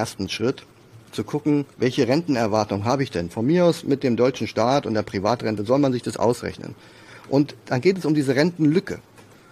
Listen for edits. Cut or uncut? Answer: cut